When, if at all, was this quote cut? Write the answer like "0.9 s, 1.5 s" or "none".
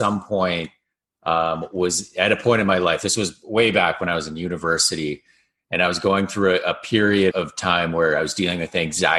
7.3 s